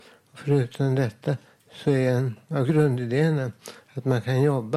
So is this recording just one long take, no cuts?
yes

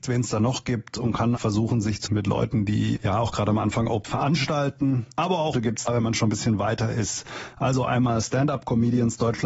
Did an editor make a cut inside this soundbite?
yes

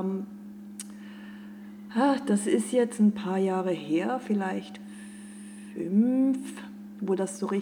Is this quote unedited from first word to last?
yes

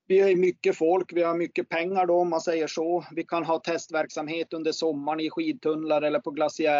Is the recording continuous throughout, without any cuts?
yes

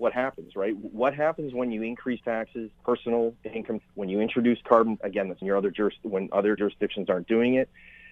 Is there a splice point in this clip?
yes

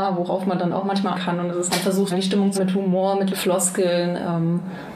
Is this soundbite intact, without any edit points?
no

